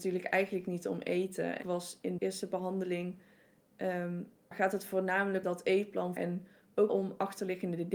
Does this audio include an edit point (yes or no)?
yes